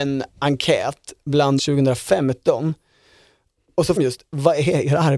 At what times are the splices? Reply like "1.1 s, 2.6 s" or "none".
1.6 s, 4.0 s